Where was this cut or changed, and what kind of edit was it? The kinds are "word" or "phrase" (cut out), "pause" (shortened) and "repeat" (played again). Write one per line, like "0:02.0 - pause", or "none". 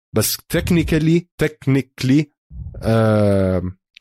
0:01.3 - pause